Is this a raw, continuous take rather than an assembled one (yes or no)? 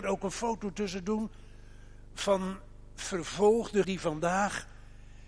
no